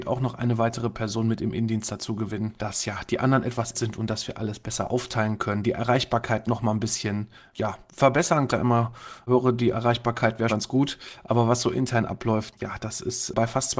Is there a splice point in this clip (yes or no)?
yes